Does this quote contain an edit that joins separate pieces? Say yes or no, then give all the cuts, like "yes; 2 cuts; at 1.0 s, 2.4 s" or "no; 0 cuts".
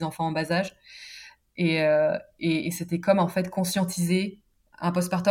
no; 0 cuts